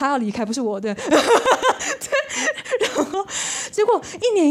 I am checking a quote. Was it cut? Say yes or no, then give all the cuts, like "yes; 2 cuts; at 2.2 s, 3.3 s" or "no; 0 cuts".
no; 0 cuts